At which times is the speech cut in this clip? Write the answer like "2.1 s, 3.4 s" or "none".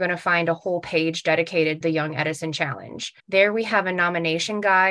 1.8 s, 3.2 s

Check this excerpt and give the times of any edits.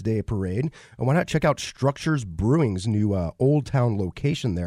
none

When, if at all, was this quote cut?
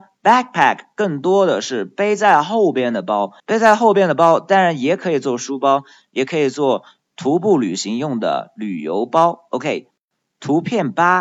3.4 s

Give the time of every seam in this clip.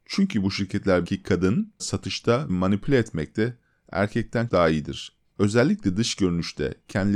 1.0 s, 1.8 s, 2.5 s, 4.5 s

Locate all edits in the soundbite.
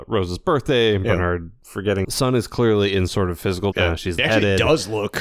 2.0 s, 3.1 s, 3.7 s, 4.2 s

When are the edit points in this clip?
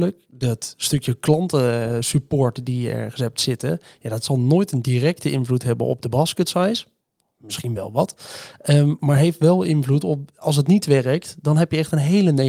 none

